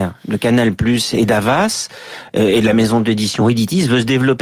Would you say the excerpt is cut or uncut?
uncut